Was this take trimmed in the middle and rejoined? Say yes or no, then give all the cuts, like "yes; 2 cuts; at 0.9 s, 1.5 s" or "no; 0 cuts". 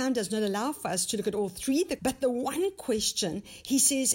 yes; 1 cut; at 2.0 s